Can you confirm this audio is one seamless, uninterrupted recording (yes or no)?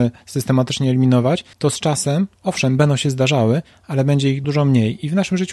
no